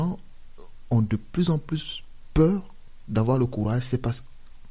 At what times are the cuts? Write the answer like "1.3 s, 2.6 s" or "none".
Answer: none